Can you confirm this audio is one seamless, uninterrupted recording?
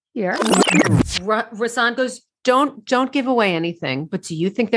yes; 0 cuts

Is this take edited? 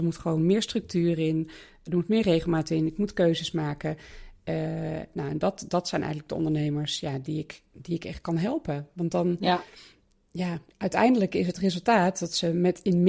no; 0 cuts

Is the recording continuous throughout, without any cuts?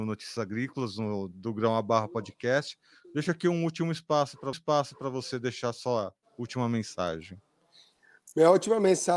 no; 1 cut; at 4.5 s

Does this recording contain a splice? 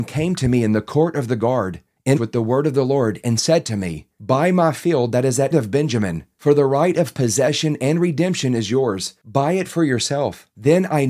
yes; 2 cuts; at 2.2 s, 5.5 s

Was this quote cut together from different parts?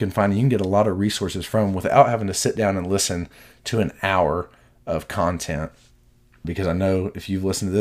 yes; 1 cut; at 6.4 s

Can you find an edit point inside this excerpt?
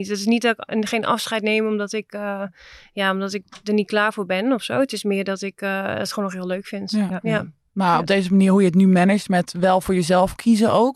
no; 0 cuts

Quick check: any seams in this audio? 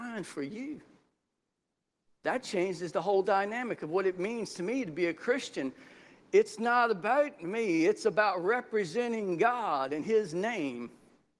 no; 0 cuts

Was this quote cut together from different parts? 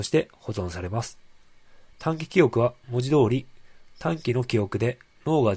yes; 1 cut; at 1.9 s

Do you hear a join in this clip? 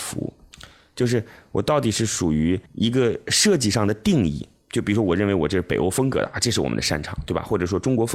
yes; 1 cut; at 2.7 s

